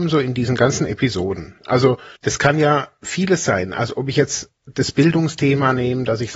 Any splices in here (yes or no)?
yes